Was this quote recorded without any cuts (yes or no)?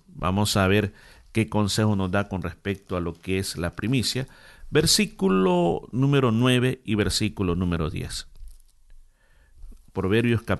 yes